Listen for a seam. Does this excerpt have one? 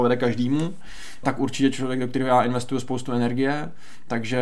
yes; 1 cut; at 1.2 s

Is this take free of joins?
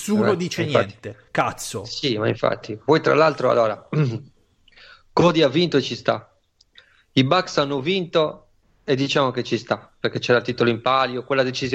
yes; 0 cuts

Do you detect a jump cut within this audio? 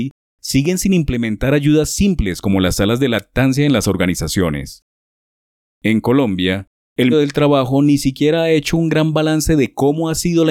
yes; 1 cut; at 7.1 s

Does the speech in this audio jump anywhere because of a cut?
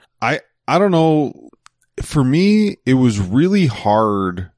no; 0 cuts

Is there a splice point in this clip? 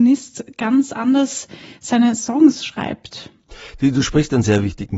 no; 0 cuts

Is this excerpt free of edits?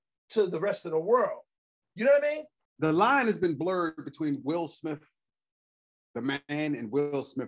yes; 0 cuts

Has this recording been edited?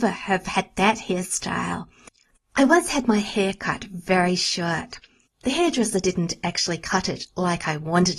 no; 0 cuts

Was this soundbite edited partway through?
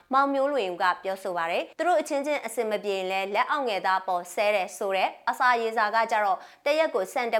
yes; 1 cut; at 1.7 s

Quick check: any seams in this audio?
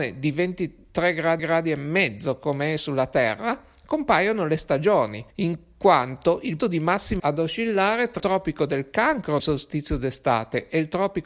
yes; 6 cuts; at 1.4 s, 5.3 s, 6.6 s, 7.2 s, 8.2 s, 9.4 s

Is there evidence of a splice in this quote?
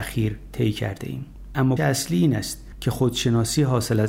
yes; 1 cut; at 1.8 s

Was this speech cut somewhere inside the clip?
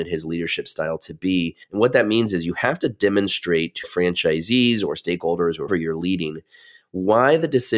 yes; 3 cuts; at 1.6 s, 3.8 s, 5.7 s

